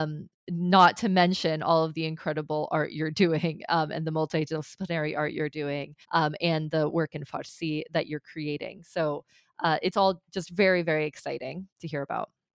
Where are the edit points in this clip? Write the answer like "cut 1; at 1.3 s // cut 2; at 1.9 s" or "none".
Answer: cut 1; at 6.0 s

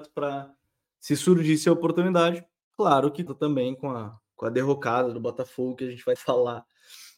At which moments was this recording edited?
cut 1; at 3.3 s // cut 2; at 6.2 s

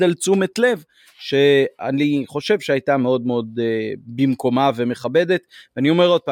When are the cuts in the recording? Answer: none

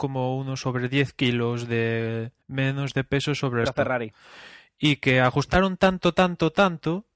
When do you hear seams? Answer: cut 1; at 2.4 s // cut 2; at 3.7 s

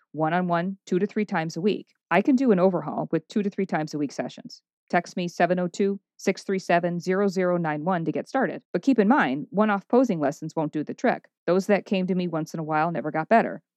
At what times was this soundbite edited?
cut 1; at 2.0 s // cut 2; at 8.7 s // cut 3; at 11.4 s

